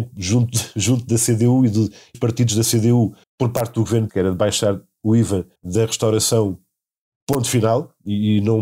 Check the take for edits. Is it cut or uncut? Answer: cut